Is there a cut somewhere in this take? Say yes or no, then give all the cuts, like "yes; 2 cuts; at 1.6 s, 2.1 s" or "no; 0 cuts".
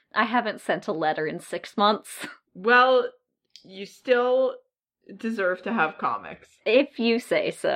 no; 0 cuts